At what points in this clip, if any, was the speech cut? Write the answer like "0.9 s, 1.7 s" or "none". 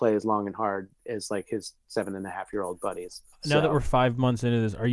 3.3 s